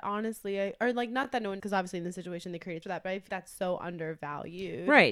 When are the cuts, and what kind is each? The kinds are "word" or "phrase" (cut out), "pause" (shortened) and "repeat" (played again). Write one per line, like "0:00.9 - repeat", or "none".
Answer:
0:01.6 - word
0:02.8 - word
0:03.3 - word